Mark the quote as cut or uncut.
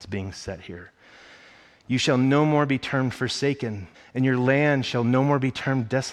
cut